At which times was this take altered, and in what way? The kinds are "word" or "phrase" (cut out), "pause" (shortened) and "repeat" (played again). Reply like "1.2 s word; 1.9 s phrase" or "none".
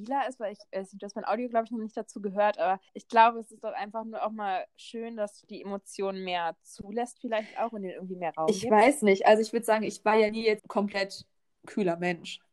2.9 s pause; 10.6 s phrase